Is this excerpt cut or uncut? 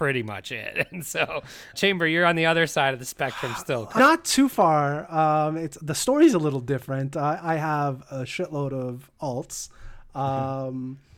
cut